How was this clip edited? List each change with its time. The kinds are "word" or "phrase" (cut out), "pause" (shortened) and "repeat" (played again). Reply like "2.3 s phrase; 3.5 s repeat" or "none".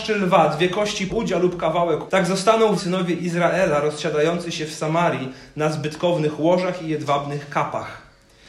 1.1 s word; 2.1 s word; 2.8 s word